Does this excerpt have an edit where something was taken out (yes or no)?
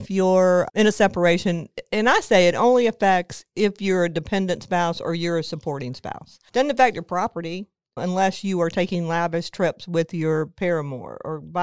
no